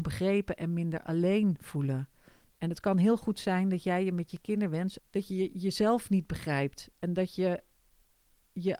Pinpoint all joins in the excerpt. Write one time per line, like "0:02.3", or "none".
0:05.0